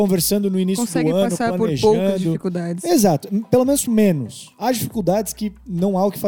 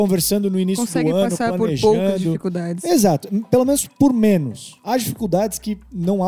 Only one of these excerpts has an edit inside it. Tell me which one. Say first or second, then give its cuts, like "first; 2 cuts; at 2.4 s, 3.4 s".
first; 1 cut; at 3.9 s